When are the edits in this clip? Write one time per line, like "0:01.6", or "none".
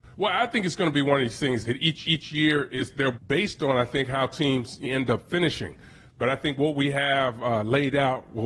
0:01.6
0:02.0
0:03.1
0:04.8